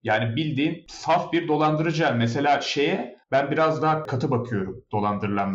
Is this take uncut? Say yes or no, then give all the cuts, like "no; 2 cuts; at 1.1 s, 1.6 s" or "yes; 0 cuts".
no; 1 cut; at 3.2 s